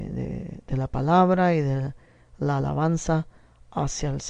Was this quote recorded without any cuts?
yes; 0 cuts

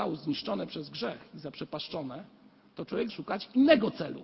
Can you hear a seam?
yes; 1 cut; at 3.1 s

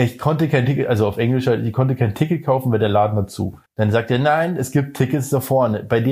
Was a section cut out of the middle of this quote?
yes; 1 cut; at 3.7 s

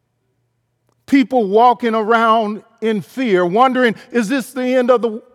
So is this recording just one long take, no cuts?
yes; 0 cuts

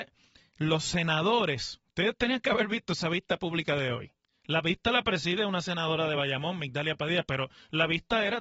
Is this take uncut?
yes; 0 cuts

